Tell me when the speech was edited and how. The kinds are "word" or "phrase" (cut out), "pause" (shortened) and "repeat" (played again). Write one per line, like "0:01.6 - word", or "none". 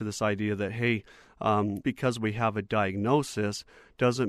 0:01.8 - word

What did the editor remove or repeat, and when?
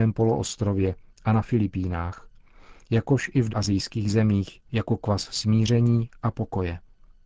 0:03.5 - word
0:04.7 - pause

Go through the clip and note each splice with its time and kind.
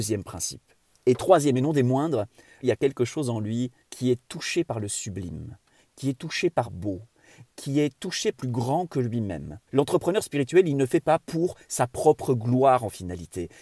0:02.6 - phrase
0:03.8 - pause
0:06.6 - word
0:08.3 - phrase
0:09.7 - pause

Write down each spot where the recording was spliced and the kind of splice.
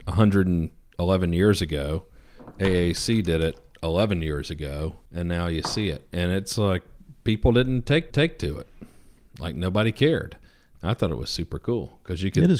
0:05.1 - pause
0:08.1 - repeat

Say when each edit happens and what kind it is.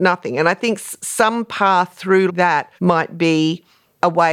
0:02.3 - word
0:02.8 - pause

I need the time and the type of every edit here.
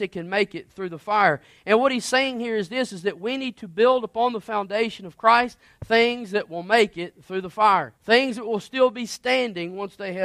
0:08.0 - pause

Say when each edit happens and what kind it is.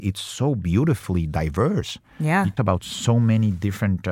0:02.6 - word

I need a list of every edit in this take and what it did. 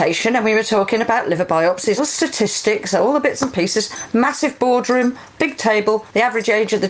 0:02.0 - word

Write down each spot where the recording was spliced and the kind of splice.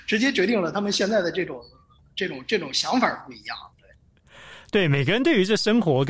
none

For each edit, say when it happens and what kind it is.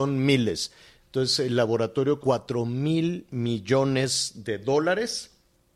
0:02.2 - word

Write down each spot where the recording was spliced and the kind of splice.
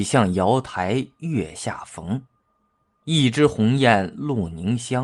none

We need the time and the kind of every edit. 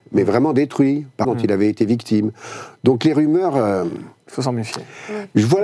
0:01.2 - phrase

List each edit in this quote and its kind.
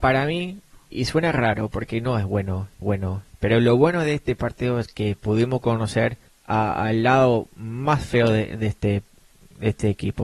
0:00.9 - word
0:02.8 - repeat
0:06.3 - pause

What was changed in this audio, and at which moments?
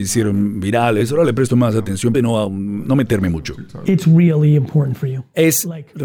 0:02.1 - phrase

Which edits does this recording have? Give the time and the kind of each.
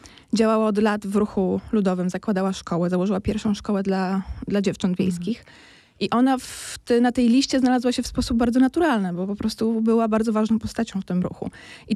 none

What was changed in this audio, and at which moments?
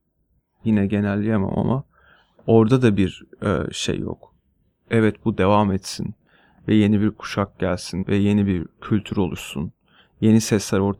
0:08.0 - word

